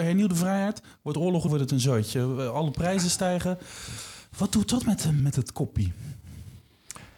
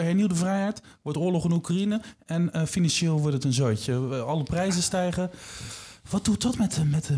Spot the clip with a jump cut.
first; 2 cuts; at 1.5 s, 5.2 s

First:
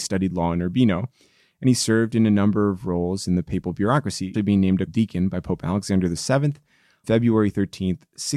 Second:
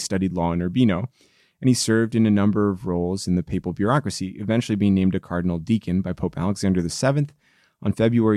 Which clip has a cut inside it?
first; 3 cuts; at 4.3 s, 4.9 s, 7.0 s

